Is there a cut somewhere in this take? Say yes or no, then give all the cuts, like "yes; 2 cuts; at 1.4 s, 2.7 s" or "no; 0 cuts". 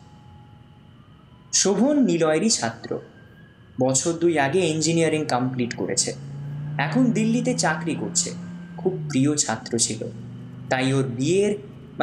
no; 0 cuts